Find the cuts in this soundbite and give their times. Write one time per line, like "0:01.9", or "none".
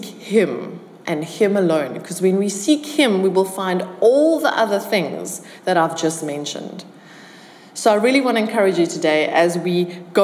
none